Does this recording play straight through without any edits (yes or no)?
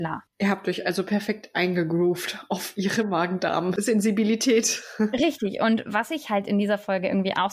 yes